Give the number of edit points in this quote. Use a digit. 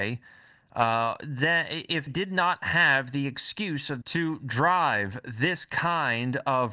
2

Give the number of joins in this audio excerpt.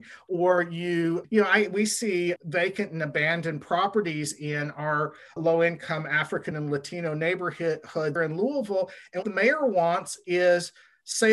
6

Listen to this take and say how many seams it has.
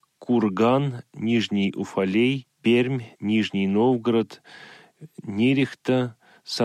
1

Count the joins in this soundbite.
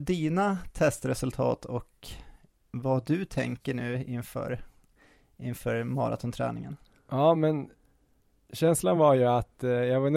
0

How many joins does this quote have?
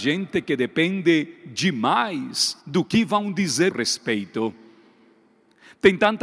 2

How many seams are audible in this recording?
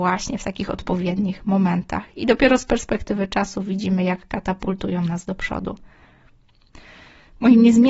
0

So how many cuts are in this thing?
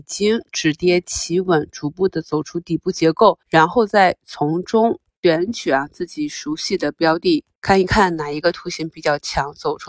1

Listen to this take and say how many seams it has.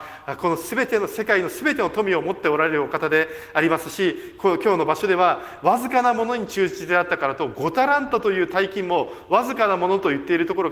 0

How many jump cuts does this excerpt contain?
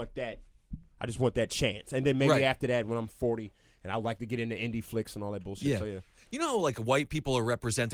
0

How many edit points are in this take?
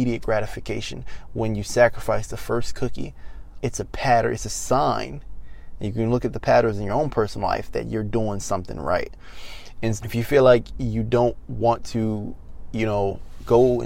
2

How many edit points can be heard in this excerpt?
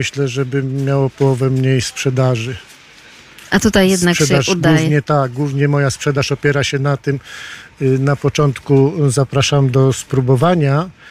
0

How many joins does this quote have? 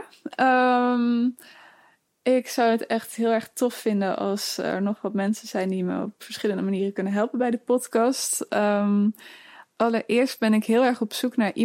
0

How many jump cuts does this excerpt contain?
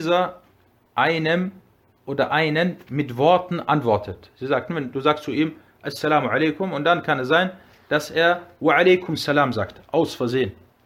0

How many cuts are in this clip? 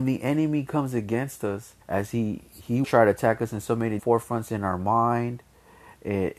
3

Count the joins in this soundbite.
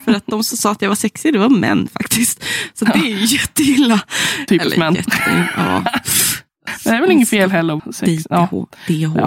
1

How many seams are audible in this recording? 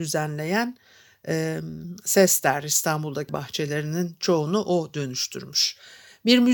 1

